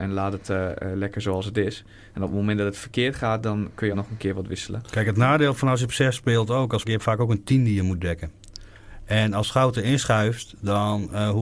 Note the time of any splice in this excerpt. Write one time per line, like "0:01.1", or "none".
0:03.9
0:06.8

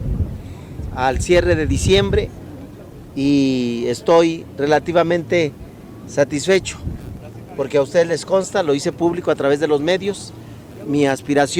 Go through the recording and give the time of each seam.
none

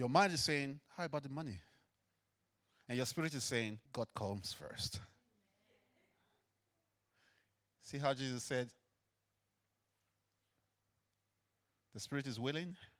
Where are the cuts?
0:03.9

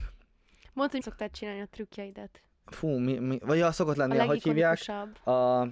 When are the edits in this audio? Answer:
0:01.0

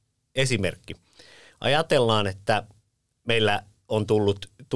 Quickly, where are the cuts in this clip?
none

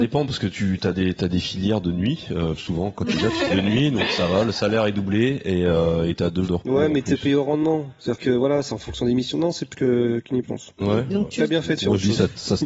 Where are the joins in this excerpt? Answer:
0:01.2
0:03.2
0:03.5
0:06.5
0:09.7
0:10.4

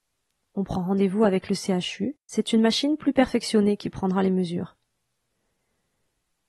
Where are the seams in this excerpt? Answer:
0:02.2

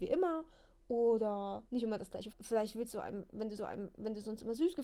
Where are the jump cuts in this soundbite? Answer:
0:01.7
0:02.3
0:03.6

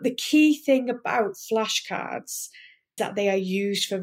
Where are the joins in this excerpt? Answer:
0:03.0

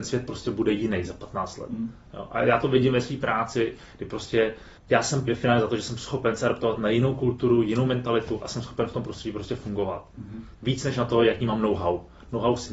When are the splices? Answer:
0:04.8
0:05.3

